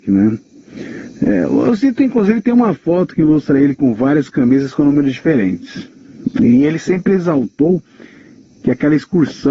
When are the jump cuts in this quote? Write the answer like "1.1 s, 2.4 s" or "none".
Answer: none

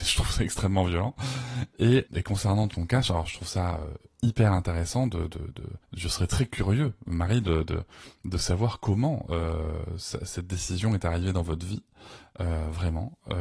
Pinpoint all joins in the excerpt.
2.1 s, 2.7 s, 5.8 s

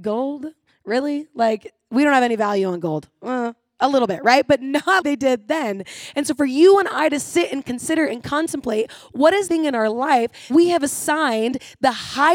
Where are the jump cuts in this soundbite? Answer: 5.0 s, 9.5 s, 10.5 s

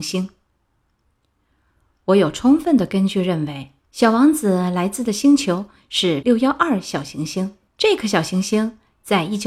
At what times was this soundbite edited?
3.8 s, 6.2 s, 7.7 s

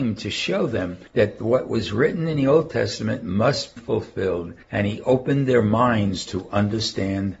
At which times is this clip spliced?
1.1 s, 3.8 s, 4.6 s

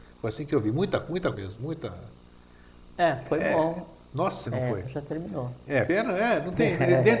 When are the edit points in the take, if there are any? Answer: 1.3 s, 4.4 s, 4.8 s, 5.9 s

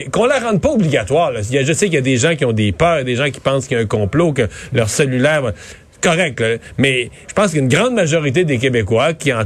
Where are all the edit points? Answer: none

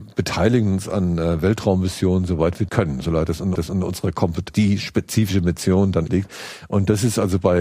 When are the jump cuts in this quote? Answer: 2.7 s, 3.5 s, 4.5 s, 6.1 s

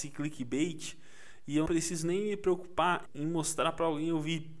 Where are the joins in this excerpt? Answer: 1.7 s, 3.1 s

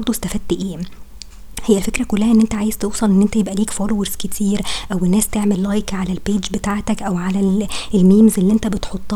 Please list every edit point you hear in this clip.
none

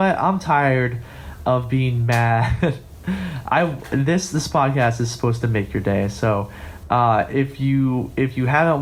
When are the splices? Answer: none

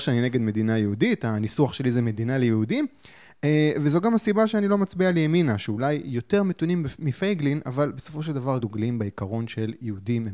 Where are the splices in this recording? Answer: 8.6 s

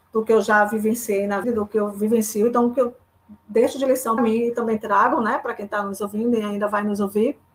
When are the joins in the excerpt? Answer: 1.4 s, 4.2 s

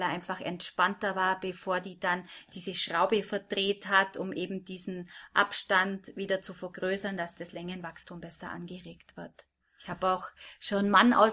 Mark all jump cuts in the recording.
9.6 s

